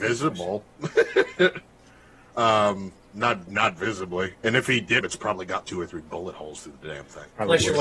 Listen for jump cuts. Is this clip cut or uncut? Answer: cut